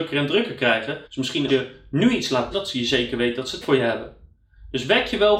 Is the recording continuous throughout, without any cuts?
no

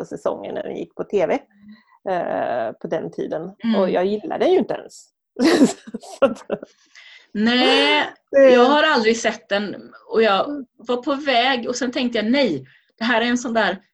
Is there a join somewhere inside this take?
no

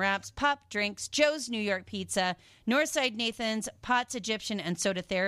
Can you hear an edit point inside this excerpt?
no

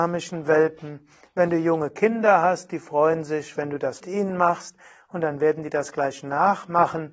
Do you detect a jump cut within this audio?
yes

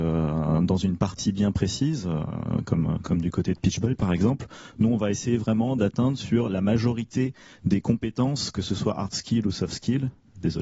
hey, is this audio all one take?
yes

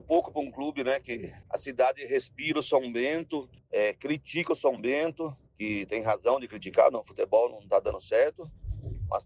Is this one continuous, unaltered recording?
yes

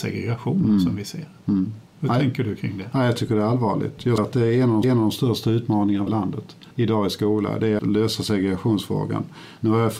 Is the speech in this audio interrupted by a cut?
yes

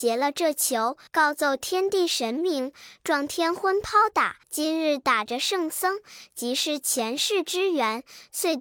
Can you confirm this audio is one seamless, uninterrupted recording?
no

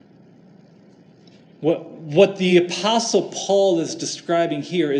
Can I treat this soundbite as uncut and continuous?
yes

